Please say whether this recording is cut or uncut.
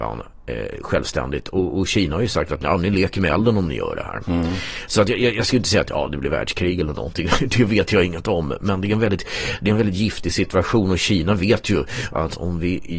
uncut